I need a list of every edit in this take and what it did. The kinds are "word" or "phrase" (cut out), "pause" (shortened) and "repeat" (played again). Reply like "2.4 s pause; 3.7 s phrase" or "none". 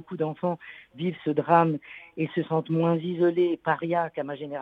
none